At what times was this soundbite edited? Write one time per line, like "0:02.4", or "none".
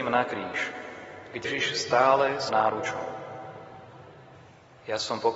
0:01.4
0:02.5